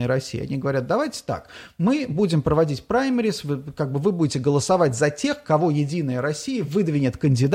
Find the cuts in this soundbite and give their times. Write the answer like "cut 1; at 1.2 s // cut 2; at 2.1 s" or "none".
none